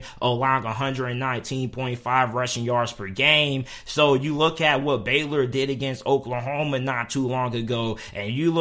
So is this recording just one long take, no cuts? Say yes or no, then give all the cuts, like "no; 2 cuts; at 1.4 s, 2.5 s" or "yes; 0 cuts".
yes; 0 cuts